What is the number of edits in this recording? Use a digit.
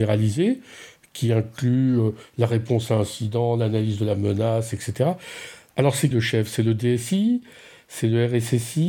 1